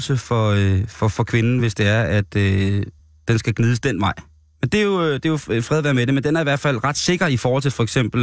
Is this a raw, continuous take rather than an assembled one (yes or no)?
yes